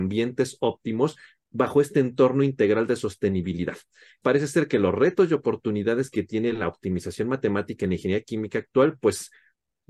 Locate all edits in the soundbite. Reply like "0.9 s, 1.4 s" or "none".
4.2 s